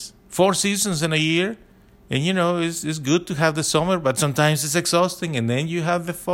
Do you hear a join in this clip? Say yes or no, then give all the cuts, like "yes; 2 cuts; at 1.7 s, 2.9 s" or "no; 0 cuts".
no; 0 cuts